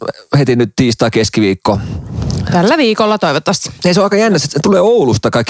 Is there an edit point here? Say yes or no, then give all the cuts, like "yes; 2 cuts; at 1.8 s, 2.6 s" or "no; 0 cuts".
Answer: no; 0 cuts